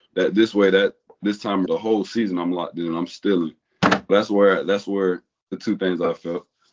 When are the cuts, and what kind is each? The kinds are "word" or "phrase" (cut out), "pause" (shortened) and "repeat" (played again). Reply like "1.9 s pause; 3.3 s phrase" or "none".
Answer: 1.7 s word; 4.1 s word